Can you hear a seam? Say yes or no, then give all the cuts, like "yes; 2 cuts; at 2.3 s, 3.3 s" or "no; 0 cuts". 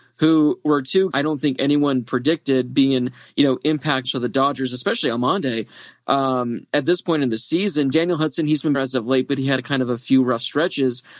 yes; 3 cuts; at 1.1 s, 4.0 s, 8.7 s